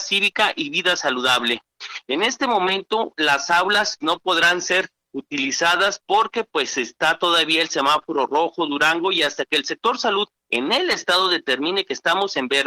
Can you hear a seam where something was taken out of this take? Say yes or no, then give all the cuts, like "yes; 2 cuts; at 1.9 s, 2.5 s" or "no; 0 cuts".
yes; 1 cut; at 4.0 s